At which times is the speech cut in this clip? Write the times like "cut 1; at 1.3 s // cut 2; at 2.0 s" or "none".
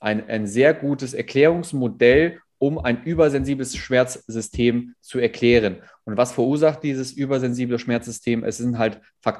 none